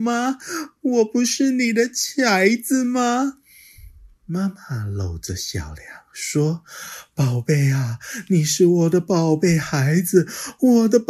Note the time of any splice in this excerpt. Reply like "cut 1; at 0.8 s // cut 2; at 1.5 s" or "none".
none